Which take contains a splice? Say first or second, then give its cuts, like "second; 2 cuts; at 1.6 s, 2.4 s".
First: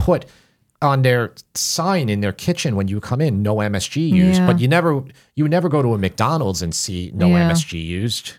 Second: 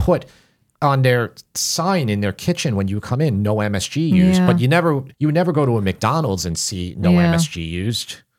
second; 1 cut; at 5.1 s